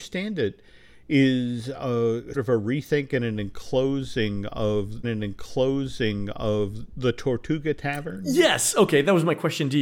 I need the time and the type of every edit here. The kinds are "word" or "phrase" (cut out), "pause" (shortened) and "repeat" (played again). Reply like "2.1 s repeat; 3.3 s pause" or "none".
2.3 s word; 5.0 s repeat

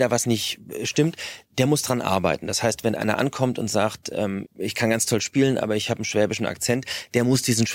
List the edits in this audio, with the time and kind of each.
4.4 s word

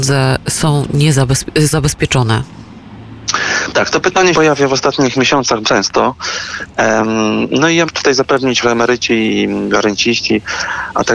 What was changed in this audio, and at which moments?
1.7 s word; 4.3 s word; 5.6 s word; 7.9 s word; 8.6 s word

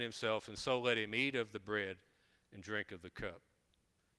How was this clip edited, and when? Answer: none

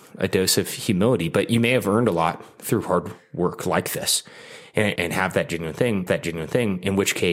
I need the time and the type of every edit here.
5.0 s word; 6.1 s repeat

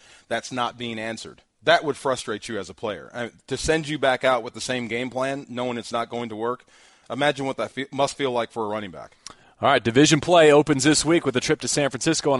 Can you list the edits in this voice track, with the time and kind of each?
1.5 s pause

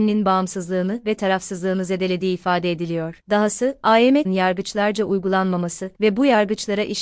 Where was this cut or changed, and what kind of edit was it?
4.2 s word; 5.9 s pause

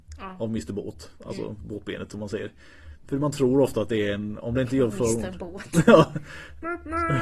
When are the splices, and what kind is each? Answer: none

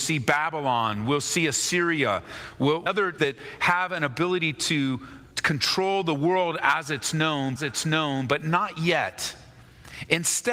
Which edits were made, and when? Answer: 2.9 s word; 3.2 s word; 5.3 s pause; 7.6 s repeat

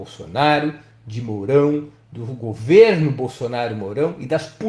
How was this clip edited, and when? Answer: none

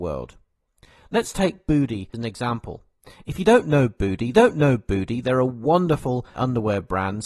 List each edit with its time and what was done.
2.1 s word; 4.3 s repeat; 6.4 s word

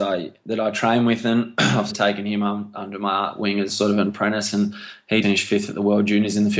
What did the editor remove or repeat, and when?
1.9 s word; 5.2 s word

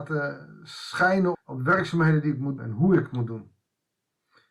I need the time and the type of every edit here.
1.3 s word; 2.6 s word

